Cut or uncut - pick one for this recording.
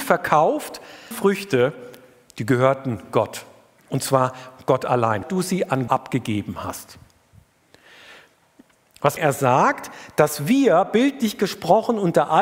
cut